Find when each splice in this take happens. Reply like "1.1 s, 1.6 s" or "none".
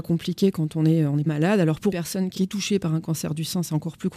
1.3 s, 1.9 s, 2.4 s